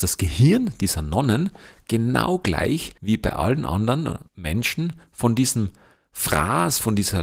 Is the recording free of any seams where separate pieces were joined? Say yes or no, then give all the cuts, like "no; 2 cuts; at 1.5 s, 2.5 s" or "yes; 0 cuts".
no; 2 cuts; at 3.0 s, 4.3 s